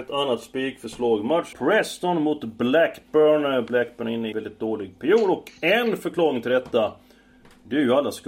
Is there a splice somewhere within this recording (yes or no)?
yes